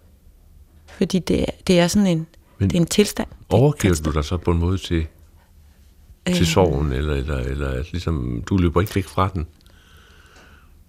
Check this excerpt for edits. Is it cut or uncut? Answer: uncut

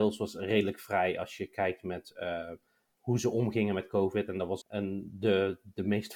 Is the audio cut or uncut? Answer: cut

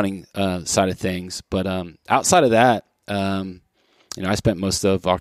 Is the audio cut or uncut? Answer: uncut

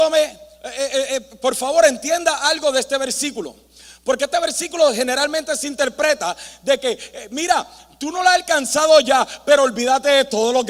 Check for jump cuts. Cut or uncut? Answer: uncut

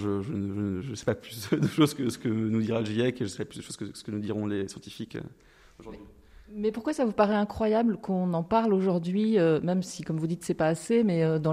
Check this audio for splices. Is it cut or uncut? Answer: uncut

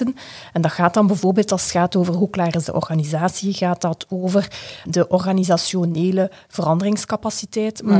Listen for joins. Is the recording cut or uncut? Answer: cut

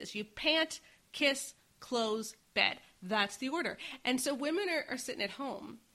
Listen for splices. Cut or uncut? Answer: uncut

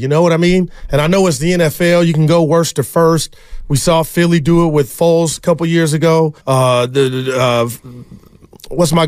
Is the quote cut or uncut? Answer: cut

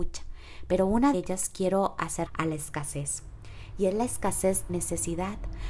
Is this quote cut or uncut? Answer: cut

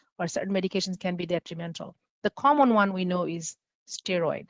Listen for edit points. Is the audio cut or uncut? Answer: uncut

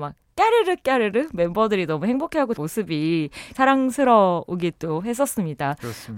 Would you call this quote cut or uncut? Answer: cut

